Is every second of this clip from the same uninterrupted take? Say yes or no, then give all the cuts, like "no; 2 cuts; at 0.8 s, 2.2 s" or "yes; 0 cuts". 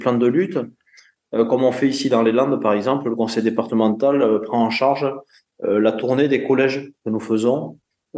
yes; 0 cuts